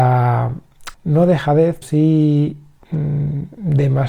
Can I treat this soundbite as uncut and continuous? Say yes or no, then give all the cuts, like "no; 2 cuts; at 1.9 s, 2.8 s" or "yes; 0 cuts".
no; 2 cuts; at 0.9 s, 1.8 s